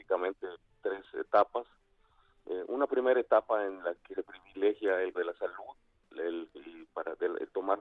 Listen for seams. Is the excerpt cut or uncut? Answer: cut